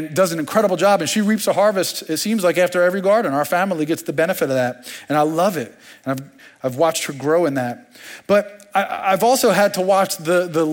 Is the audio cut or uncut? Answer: uncut